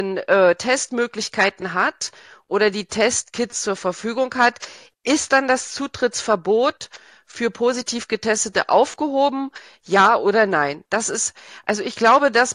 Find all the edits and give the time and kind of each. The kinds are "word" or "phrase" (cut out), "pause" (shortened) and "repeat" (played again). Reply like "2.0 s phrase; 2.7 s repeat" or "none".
none